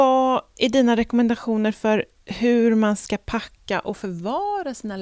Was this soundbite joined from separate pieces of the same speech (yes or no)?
no